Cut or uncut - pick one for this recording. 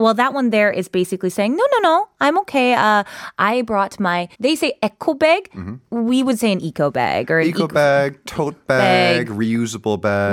cut